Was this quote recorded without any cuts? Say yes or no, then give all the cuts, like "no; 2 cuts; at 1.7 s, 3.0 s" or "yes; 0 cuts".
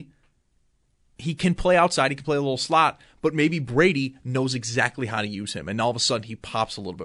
yes; 0 cuts